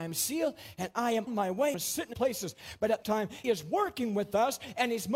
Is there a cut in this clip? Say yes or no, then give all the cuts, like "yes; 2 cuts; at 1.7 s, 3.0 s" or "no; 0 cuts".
yes; 5 cuts; at 1.3 s, 1.7 s, 2.1 s, 3.0 s, 3.4 s